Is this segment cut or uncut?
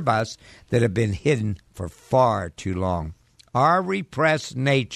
cut